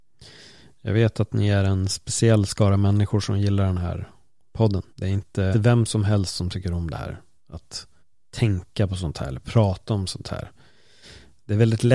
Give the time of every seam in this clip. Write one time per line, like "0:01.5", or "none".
0:04.9
0:05.5
0:08.0